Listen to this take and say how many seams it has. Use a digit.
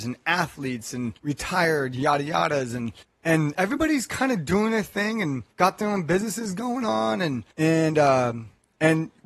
4